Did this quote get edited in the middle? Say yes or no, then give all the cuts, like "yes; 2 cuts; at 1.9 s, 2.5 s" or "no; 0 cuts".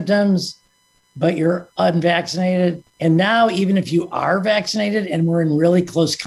no; 0 cuts